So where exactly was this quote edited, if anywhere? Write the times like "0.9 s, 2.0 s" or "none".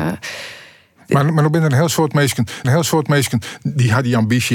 2.6 s